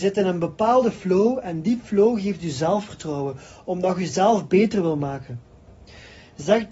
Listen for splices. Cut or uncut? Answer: uncut